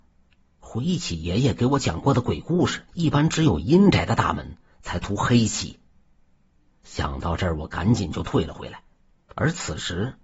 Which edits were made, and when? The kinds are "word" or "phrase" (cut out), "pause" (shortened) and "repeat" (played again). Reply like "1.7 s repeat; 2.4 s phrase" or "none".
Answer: 2.9 s pause